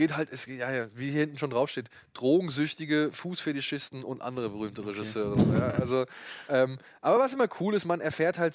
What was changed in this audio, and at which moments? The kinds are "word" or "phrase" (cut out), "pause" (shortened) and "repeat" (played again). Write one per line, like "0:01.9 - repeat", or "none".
none